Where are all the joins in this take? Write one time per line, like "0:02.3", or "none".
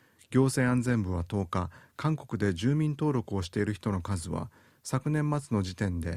none

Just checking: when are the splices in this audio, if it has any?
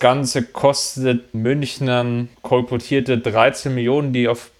0:01.3
0:02.3

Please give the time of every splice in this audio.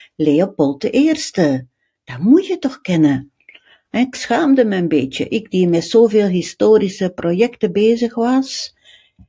none

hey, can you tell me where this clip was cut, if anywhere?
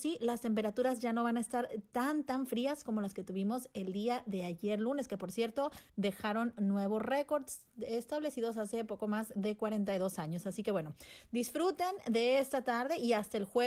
0:05.9

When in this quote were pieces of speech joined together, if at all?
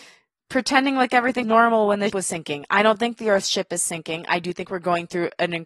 0:01.4
0:02.1

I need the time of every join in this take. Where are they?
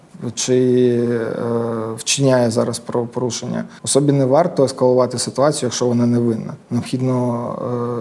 0:03.8
0:06.6

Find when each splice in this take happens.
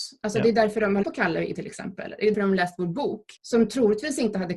0:01.0
0:01.5
0:02.3
0:03.4

